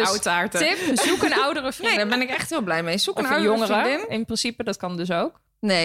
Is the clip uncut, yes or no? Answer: no